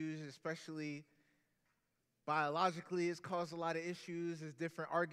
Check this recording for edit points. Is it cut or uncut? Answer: uncut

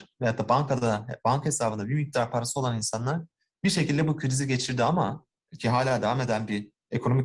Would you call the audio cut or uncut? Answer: uncut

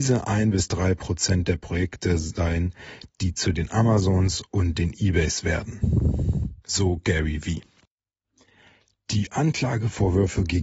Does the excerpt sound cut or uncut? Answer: uncut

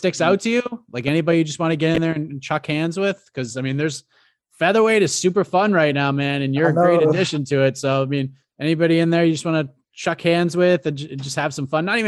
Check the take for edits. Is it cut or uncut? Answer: uncut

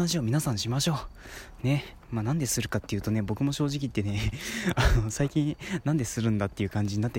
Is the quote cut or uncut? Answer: uncut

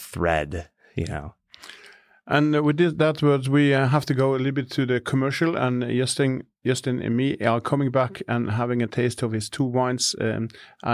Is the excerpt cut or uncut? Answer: uncut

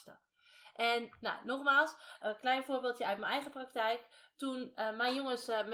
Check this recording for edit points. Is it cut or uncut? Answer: cut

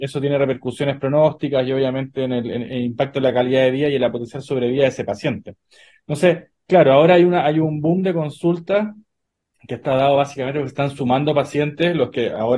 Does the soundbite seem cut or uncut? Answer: uncut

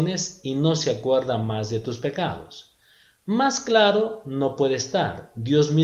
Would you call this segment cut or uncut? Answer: uncut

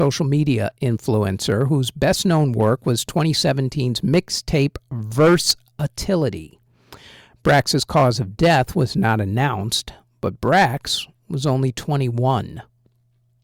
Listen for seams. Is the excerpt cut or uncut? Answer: uncut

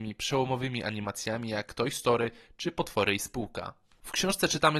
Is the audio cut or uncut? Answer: uncut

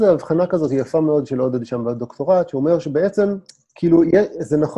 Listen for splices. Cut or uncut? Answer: cut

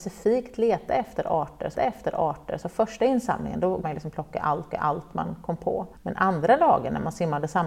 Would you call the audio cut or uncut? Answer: cut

